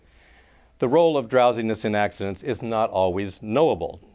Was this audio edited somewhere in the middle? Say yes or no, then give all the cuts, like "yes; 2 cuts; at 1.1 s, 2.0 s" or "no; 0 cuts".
no; 0 cuts